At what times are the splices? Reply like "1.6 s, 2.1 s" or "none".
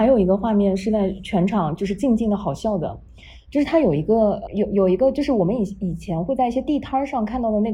4.5 s